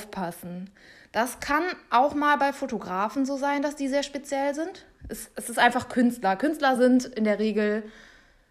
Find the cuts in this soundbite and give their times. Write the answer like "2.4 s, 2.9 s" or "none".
none